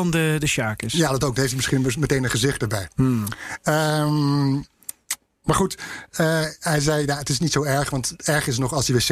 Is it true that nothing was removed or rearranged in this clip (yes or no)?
yes